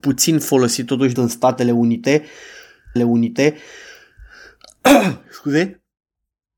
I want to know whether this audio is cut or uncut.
cut